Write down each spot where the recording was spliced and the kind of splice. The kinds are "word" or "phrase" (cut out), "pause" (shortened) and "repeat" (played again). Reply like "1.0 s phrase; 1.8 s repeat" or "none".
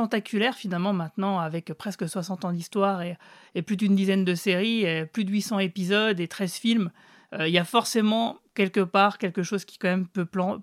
none